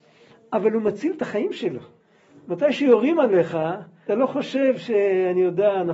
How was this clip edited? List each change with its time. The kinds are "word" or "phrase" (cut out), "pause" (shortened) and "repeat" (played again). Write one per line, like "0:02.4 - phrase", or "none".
0:02.0 - pause
0:04.1 - word